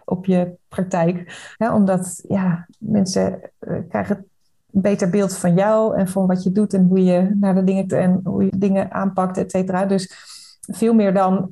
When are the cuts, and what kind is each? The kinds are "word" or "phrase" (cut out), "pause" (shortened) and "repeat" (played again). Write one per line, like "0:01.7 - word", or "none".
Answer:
0:01.5 - pause
0:07.9 - word
0:08.5 - word